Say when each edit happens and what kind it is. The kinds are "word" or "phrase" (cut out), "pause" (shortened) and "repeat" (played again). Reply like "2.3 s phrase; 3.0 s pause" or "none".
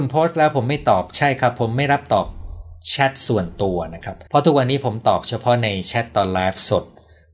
4.3 s pause

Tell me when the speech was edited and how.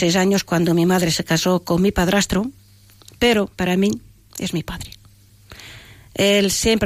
none

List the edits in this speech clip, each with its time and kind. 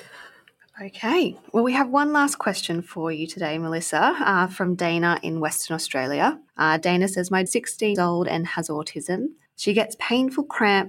6.5 s pause; 7.5 s phrase; 8.0 s word; 9.5 s pause

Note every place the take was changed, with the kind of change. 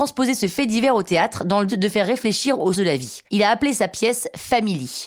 1.7 s word; 2.7 s word; 3.3 s pause

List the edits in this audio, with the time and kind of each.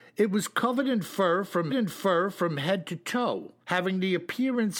1.7 s repeat; 3.6 s pause

